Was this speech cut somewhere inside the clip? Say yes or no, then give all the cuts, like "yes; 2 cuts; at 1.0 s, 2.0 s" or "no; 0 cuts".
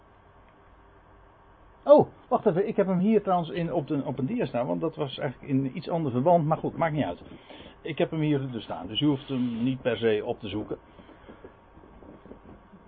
no; 0 cuts